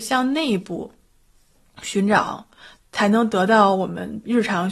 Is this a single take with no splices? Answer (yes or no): yes